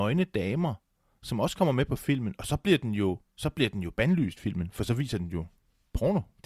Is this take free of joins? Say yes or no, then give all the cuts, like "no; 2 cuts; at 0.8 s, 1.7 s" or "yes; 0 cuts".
yes; 0 cuts